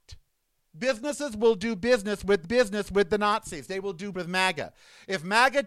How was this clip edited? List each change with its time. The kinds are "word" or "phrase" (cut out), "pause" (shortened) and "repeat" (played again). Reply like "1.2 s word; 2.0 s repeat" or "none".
2.4 s repeat; 4.1 s word